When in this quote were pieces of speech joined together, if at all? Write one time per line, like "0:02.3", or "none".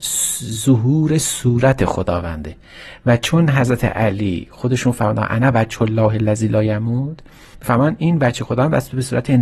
none